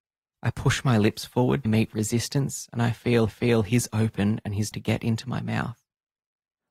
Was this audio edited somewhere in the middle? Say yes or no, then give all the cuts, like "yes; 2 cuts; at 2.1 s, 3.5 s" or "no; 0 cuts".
yes; 3 cuts; at 1.7 s, 3.3 s, 4.7 s